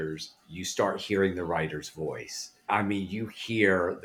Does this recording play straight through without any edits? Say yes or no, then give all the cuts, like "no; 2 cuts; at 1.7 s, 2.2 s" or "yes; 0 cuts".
yes; 0 cuts